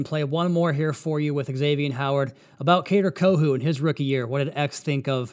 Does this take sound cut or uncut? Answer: uncut